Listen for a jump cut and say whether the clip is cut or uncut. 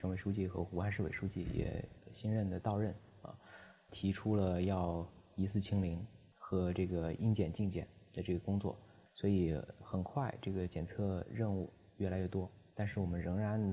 uncut